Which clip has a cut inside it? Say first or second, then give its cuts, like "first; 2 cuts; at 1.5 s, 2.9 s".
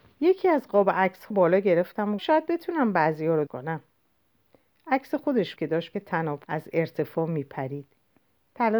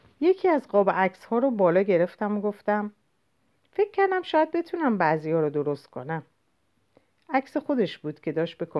first; 6 cuts; at 1.3 s, 2.2 s, 3.5 s, 5.6 s, 5.9 s, 6.4 s